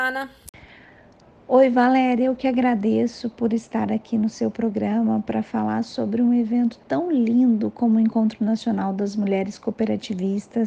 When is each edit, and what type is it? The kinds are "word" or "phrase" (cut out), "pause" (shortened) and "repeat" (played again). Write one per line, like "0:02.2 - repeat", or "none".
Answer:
none